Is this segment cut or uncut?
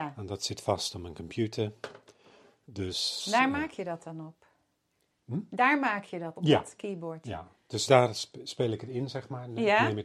cut